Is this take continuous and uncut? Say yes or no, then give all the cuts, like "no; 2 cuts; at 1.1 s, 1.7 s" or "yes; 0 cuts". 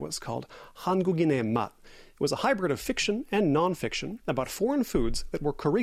yes; 0 cuts